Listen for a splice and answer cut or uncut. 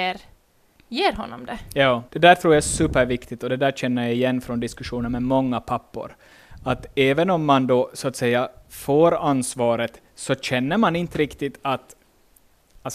cut